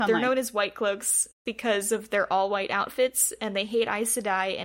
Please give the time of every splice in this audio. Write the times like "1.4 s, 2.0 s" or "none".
none